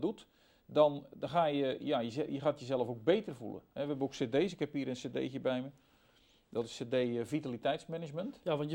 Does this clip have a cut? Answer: no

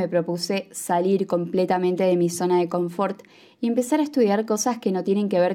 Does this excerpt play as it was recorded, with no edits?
yes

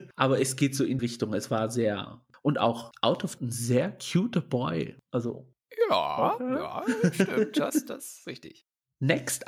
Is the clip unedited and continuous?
no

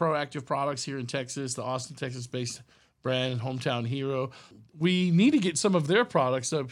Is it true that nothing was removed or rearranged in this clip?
yes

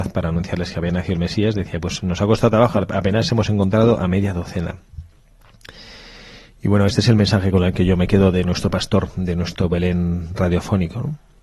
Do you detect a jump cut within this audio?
no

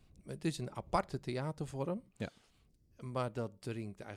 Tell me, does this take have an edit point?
yes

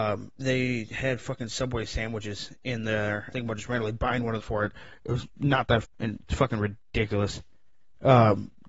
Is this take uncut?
no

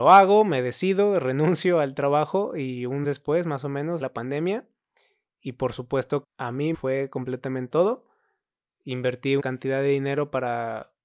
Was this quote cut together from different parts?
yes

